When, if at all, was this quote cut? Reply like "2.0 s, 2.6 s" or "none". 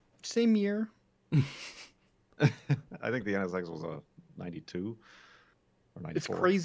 none